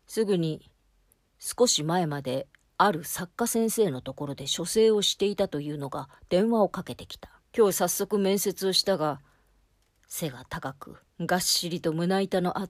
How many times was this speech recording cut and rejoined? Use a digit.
2